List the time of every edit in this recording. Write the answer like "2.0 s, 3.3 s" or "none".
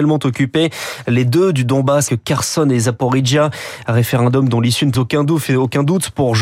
2.1 s, 4.9 s